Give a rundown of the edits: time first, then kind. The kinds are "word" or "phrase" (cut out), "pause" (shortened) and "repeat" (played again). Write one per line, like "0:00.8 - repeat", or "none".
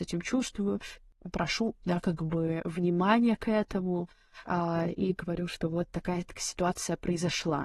none